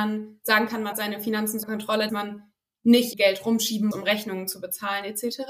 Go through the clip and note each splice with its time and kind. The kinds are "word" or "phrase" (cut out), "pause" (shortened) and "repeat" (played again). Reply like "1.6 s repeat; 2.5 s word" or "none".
0.9 s word; 1.6 s word; 2.1 s word; 3.1 s word; 3.9 s word